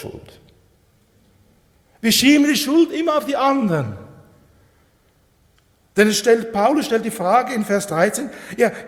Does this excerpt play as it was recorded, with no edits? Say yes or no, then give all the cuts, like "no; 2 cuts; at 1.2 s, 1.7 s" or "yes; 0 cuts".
yes; 0 cuts